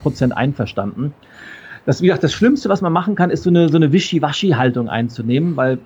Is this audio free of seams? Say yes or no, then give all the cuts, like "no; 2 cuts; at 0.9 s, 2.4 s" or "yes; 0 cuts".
yes; 0 cuts